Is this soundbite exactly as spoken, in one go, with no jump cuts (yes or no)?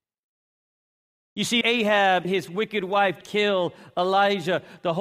no